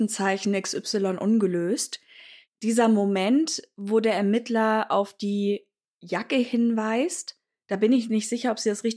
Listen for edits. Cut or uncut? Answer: uncut